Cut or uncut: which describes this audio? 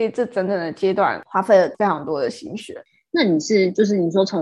uncut